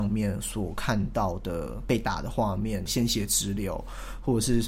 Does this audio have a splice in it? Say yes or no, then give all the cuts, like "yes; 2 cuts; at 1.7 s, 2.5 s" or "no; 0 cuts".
yes; 1 cut; at 2.9 s